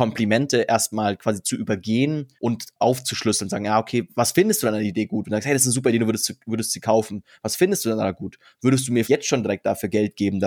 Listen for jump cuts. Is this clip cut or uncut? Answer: cut